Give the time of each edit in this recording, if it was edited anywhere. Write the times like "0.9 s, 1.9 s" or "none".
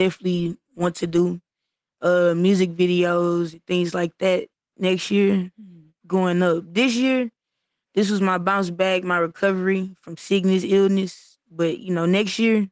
none